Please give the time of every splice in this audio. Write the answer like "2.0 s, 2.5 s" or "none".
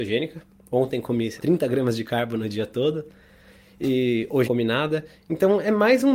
1.4 s, 4.4 s